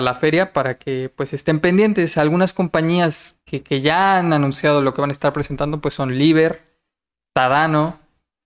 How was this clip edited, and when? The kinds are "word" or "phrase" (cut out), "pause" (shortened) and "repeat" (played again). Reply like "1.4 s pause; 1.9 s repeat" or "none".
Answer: none